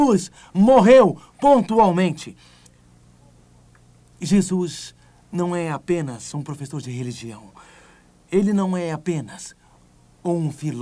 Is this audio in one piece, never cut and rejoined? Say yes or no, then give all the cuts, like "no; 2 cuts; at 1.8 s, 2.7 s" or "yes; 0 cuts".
yes; 0 cuts